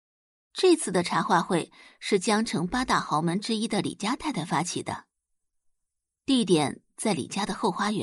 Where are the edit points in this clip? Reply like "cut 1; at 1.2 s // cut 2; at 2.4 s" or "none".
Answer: none